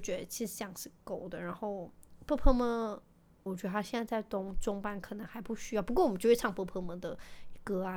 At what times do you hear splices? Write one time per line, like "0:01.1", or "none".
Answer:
0:03.5